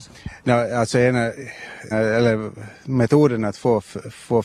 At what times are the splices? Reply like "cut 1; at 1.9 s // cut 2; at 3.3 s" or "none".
cut 1; at 1.9 s